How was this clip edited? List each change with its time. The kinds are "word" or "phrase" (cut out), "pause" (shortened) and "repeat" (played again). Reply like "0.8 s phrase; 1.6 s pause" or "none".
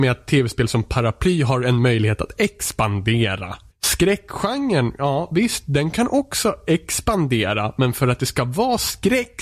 3.7 s pause